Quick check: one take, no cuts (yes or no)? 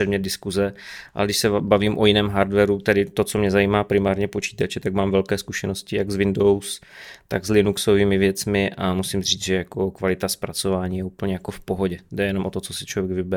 yes